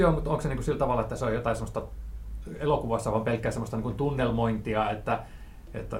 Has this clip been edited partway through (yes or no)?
no